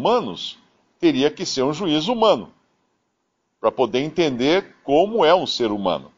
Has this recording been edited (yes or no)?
no